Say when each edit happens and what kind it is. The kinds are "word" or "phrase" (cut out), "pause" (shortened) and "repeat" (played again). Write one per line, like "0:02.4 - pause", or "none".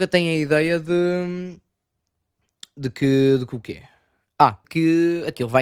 0:04.6 - word